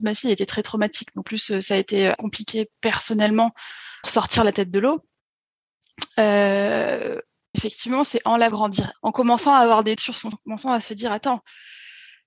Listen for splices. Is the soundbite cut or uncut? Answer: cut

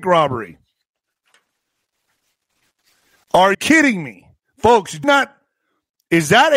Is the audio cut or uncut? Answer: cut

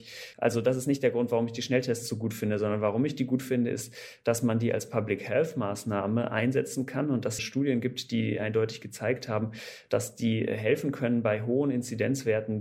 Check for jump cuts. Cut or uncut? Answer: cut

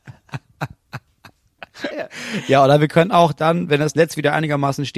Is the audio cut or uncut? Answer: uncut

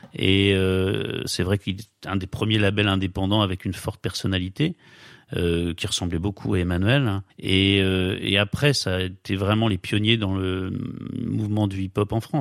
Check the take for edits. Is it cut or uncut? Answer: cut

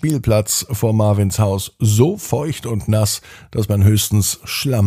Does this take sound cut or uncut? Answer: uncut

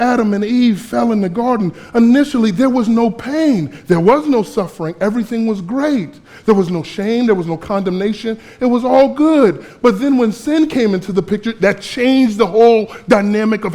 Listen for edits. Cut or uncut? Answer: uncut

